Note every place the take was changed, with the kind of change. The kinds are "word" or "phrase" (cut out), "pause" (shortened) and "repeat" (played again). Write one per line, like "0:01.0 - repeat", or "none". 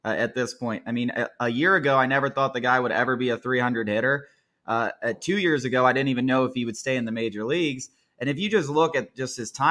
none